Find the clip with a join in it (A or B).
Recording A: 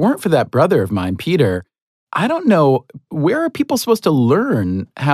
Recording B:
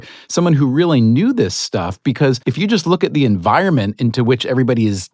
B